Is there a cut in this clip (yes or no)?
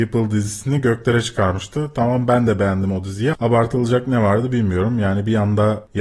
yes